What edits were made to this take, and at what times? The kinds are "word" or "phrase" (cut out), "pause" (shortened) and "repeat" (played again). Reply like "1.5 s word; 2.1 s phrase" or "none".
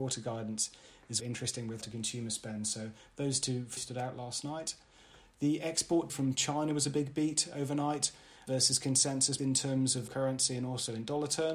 1.2 s word; 1.8 s word; 3.8 s word; 6.1 s word; 8.5 s word; 9.4 s word; 10.1 s word